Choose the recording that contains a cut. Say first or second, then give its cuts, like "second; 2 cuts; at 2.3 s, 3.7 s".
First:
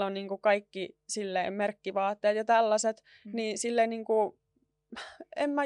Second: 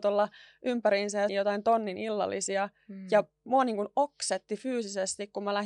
second; 1 cut; at 1.3 s